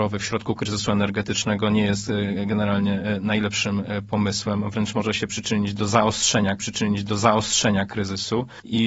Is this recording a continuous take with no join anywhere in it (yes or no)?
no